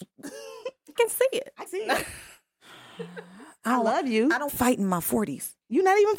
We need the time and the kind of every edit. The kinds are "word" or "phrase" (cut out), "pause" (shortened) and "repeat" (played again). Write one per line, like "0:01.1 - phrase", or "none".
0:01.0 - phrase
0:01.7 - word
0:04.5 - phrase